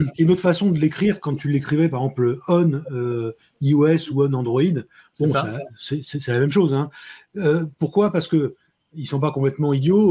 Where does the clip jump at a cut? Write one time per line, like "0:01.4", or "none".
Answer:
none